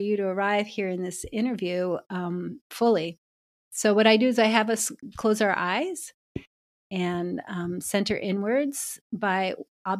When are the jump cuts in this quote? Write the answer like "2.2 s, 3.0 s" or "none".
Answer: none